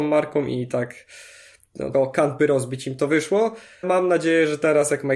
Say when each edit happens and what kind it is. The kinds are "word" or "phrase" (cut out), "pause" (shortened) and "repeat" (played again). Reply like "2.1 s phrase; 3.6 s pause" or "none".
1.9 s word; 2.4 s word; 3.8 s word